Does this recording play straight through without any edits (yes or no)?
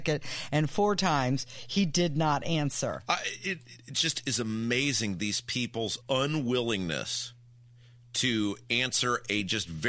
no